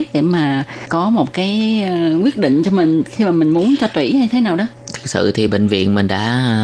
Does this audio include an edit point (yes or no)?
no